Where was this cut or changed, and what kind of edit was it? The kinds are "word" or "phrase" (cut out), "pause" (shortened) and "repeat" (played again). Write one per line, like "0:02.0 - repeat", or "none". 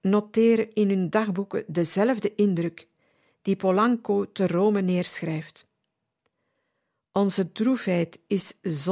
none